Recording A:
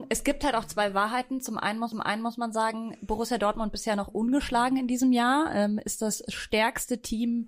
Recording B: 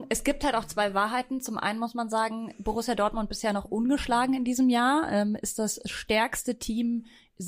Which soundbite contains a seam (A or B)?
A